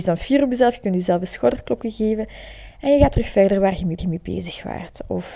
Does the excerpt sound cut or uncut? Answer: cut